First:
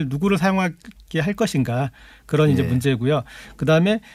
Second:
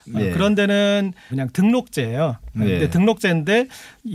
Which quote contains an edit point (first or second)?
second